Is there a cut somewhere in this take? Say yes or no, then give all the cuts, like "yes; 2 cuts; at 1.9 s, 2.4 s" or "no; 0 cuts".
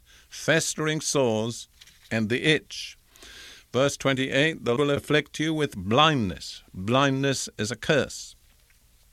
yes; 1 cut; at 4.8 s